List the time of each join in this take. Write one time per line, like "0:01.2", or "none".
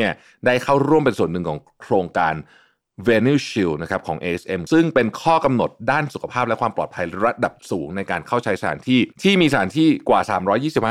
0:04.7
0:07.6
0:09.1